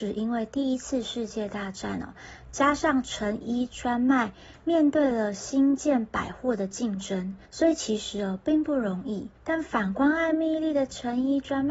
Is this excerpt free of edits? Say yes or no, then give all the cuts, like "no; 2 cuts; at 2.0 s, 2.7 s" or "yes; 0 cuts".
no; 2 cuts; at 7.4 s, 9.3 s